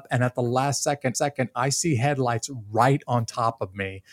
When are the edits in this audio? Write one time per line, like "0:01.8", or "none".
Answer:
0:01.1